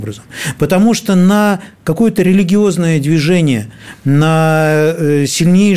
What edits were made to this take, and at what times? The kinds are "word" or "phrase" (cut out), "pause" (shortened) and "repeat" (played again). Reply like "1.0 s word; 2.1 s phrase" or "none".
none